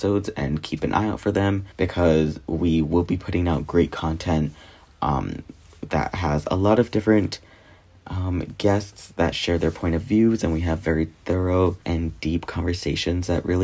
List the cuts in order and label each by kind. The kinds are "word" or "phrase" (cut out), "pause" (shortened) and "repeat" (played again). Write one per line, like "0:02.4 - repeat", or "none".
0:01.7 - pause
0:11.8 - pause